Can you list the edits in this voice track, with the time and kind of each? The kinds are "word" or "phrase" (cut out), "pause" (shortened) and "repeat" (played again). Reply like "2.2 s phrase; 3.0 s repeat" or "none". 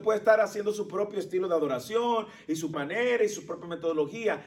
2.7 s word